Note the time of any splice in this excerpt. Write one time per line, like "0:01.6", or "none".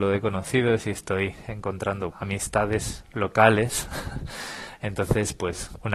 0:02.1